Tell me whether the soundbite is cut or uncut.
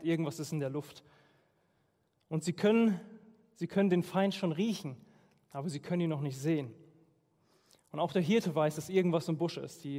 uncut